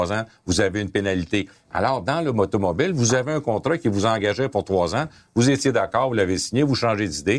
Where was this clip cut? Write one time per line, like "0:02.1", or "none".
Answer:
none